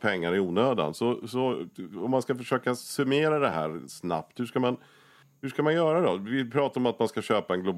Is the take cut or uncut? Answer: uncut